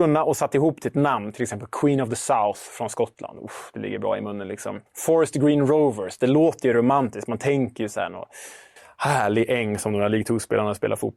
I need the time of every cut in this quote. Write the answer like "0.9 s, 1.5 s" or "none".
4.9 s, 8.8 s